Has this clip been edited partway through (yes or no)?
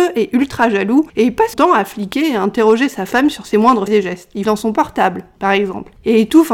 yes